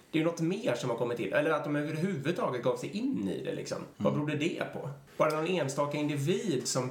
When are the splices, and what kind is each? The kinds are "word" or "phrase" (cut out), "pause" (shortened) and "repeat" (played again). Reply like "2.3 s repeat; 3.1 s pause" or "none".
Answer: 3.9 s pause; 5.1 s pause